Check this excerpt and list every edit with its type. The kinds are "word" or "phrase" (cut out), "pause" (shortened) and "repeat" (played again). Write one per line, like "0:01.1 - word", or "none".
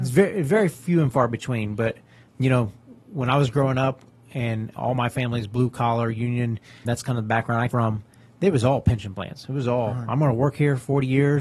0:02.3 - word
0:04.8 - word
0:06.8 - word
0:07.7 - word